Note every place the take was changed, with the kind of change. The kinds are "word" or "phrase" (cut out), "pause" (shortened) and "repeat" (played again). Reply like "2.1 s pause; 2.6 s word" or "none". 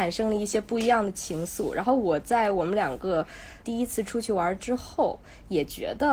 3.6 s word